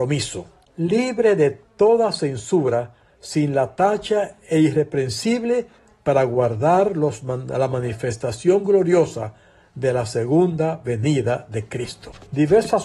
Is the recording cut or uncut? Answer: uncut